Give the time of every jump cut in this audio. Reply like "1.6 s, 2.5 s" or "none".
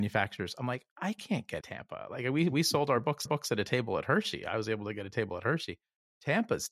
1.6 s, 3.3 s